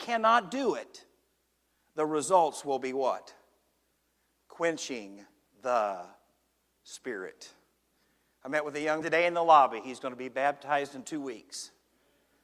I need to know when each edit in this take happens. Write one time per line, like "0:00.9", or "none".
0:09.0